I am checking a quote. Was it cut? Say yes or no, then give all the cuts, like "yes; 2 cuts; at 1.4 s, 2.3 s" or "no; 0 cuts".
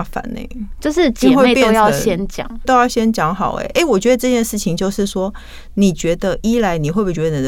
yes; 1 cut; at 2.6 s